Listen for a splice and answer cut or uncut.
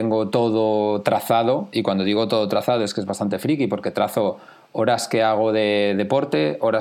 uncut